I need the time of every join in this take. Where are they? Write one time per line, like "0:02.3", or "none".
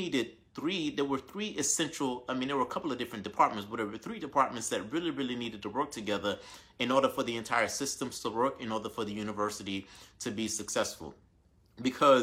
none